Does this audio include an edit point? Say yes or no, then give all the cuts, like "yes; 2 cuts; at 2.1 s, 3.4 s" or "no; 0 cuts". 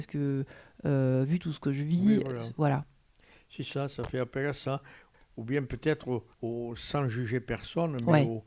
yes; 1 cut; at 6.3 s